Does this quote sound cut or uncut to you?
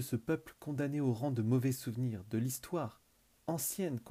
uncut